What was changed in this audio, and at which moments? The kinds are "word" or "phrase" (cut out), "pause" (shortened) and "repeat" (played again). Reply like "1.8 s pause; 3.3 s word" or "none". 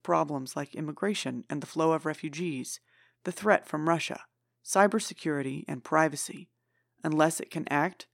none